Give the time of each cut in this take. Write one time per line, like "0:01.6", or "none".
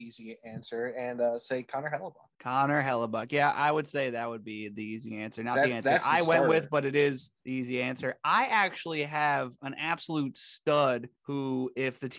0:02.3
0:07.4
0:11.1